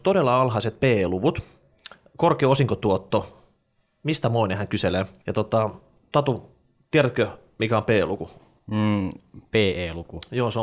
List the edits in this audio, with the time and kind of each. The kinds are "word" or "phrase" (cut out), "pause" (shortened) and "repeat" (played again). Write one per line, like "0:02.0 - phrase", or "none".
none